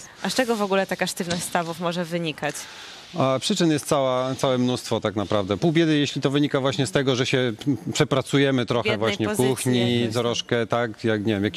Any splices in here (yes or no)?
no